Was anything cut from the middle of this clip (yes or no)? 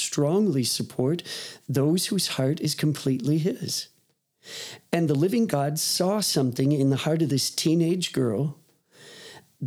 no